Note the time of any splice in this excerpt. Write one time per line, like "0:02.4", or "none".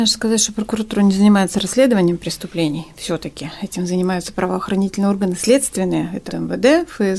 0:06.3